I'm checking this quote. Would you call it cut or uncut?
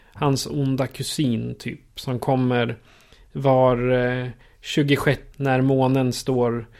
cut